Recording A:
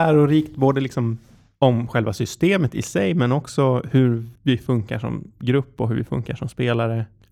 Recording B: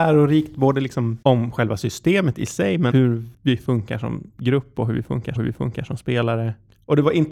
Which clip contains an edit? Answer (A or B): B